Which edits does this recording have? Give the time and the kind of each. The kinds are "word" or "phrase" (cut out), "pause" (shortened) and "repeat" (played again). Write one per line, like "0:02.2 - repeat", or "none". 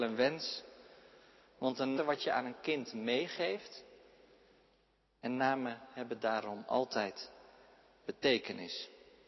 0:02.0 - phrase